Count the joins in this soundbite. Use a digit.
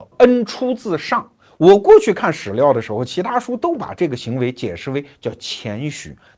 0